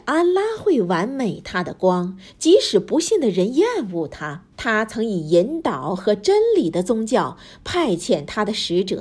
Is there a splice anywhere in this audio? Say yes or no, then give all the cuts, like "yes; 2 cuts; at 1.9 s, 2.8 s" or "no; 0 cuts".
yes; 1 cut; at 4.5 s